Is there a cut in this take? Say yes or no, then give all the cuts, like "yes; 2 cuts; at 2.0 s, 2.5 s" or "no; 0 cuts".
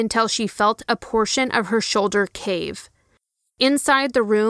no; 0 cuts